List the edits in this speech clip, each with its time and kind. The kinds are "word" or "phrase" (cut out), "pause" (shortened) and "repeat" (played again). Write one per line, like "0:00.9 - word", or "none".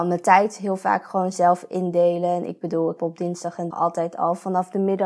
0:03.0 - word
0:03.7 - word

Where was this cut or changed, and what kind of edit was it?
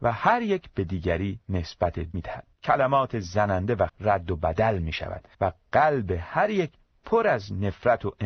0:02.1 - word
0:02.5 - pause
0:03.9 - word
0:05.3 - pause

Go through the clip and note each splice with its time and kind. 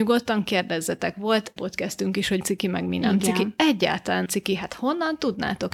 0:01.6 - word
0:02.4 - word
0:04.3 - word

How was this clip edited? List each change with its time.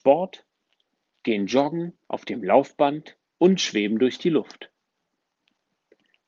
0:02.0 - pause
0:03.3 - pause

